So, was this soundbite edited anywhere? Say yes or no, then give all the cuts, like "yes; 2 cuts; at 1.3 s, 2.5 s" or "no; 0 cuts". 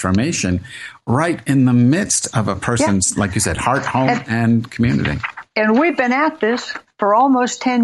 no; 0 cuts